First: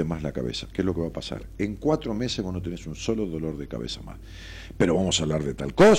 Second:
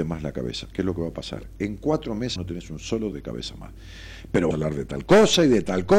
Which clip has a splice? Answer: second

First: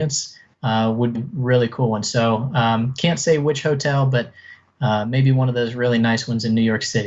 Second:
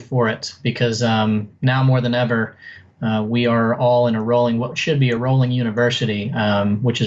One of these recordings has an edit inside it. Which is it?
first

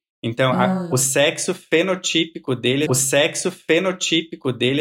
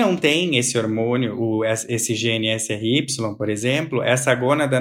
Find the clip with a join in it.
first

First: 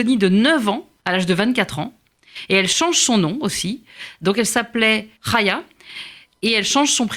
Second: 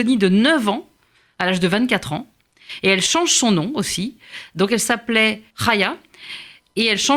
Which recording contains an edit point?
first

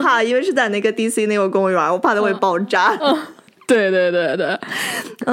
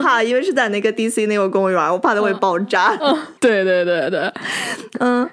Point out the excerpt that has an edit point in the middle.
second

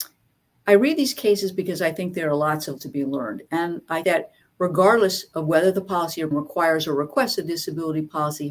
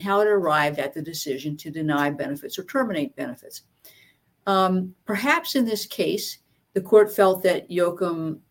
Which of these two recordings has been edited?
first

